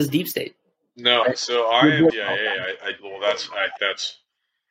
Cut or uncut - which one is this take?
cut